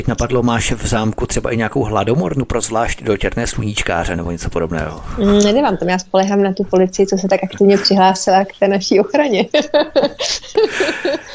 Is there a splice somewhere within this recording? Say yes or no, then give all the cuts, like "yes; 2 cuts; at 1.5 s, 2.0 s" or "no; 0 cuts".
no; 0 cuts